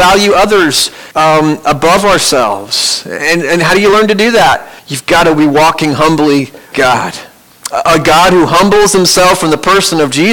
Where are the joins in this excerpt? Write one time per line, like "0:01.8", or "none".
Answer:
0:01.1
0:04.8
0:06.7